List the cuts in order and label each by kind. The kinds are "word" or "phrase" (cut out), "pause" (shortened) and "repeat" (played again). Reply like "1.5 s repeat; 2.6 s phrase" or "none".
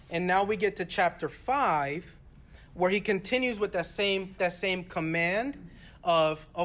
4.4 s word